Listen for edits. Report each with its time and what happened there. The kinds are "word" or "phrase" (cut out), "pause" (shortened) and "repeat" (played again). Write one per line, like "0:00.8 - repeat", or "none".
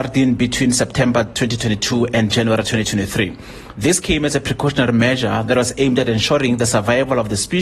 none